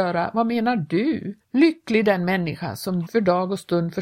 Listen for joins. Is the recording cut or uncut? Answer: cut